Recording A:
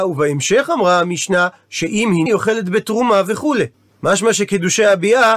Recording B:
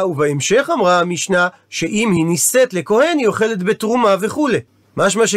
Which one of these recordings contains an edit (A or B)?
A